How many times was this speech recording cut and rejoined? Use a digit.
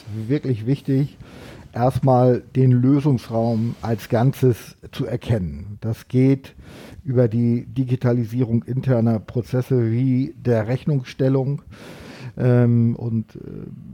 0